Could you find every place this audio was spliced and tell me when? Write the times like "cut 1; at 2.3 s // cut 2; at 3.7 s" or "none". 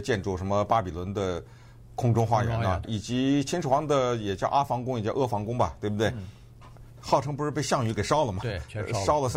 cut 1; at 2.8 s